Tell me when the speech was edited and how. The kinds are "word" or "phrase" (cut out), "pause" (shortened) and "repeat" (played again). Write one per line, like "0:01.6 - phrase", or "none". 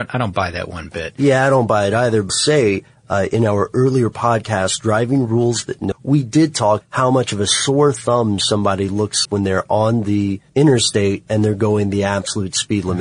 0:02.3 - phrase
0:05.9 - phrase
0:06.8 - word
0:09.2 - word
0:10.5 - pause